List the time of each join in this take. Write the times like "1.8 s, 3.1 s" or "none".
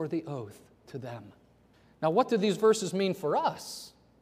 1.7 s